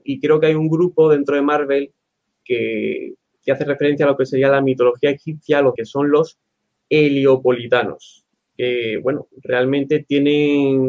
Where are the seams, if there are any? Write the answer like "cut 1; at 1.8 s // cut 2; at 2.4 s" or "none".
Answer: cut 1; at 2.4 s // cut 2; at 5.8 s // cut 3; at 8.3 s